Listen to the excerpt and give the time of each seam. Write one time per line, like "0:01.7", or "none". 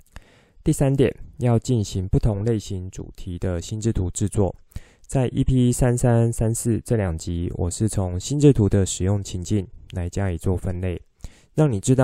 none